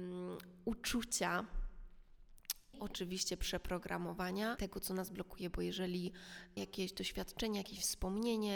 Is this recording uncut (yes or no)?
no